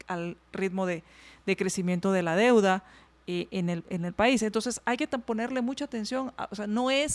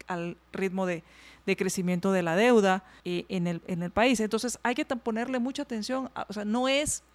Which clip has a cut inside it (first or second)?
second